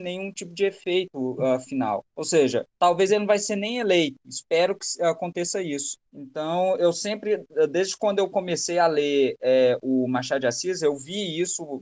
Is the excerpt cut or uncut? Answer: cut